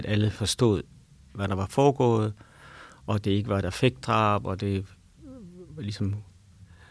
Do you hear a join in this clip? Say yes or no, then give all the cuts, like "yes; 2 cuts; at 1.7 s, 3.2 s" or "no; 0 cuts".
no; 0 cuts